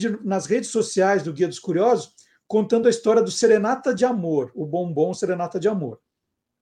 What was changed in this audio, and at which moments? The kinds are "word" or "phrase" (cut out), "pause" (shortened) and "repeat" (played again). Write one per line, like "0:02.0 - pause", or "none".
none